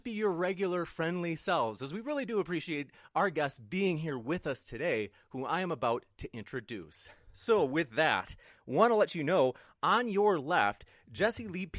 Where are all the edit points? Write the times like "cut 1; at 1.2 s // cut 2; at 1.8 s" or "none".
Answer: none